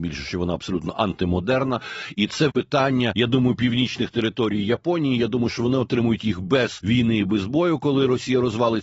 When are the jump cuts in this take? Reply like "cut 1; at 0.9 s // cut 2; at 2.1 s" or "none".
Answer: cut 1; at 2.5 s